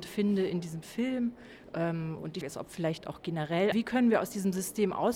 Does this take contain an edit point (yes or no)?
yes